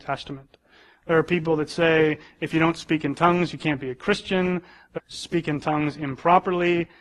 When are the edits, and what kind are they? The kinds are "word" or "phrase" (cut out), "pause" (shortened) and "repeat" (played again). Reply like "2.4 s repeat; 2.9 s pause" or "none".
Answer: 5.0 s phrase

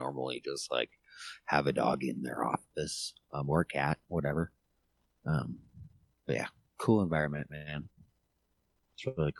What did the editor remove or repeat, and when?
none

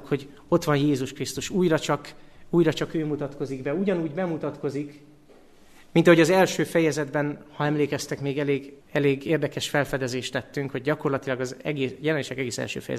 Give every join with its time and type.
8.8 s pause

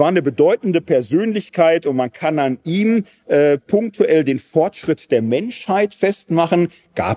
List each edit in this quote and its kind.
none

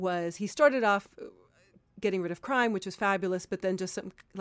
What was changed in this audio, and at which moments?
none

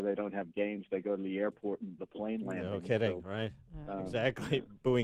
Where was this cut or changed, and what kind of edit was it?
2.0 s word

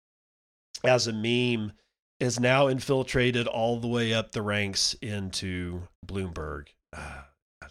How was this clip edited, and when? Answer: 5.9 s pause

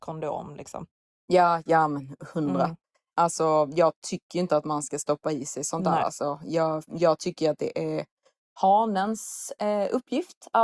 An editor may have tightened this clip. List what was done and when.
none

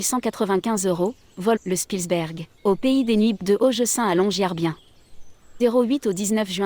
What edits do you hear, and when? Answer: 1.6 s phrase; 2.6 s pause; 3.4 s word; 5.6 s word

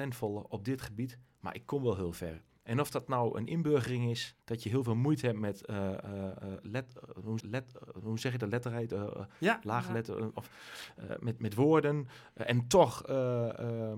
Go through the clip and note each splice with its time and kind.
4.4 s pause; 7.4 s repeat; 11.4 s word

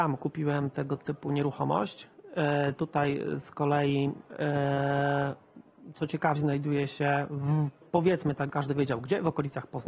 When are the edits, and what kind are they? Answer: 6.4 s word; 7.8 s word; 8.5 s word

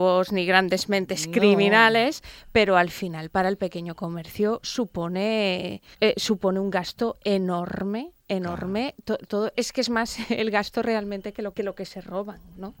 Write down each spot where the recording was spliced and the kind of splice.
5.9 s pause; 9.5 s word; 11.5 s word

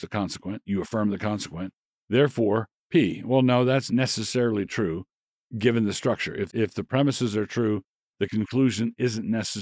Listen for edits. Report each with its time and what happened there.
2.8 s pause; 3.9 s word; 6.5 s word

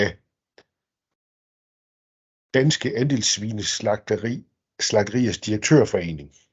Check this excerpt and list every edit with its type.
none

